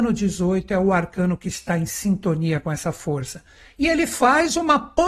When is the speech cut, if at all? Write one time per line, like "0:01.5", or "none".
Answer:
none